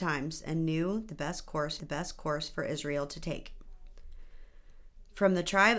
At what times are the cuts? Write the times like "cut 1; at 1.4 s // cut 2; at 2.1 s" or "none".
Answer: cut 1; at 1.8 s